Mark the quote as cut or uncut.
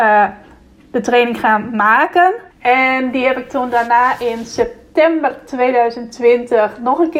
cut